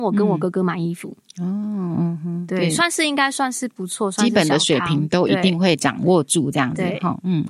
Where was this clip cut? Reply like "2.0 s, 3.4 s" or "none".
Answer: none